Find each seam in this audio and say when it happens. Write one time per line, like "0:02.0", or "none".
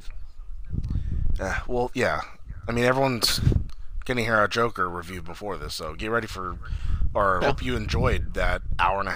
0:07.4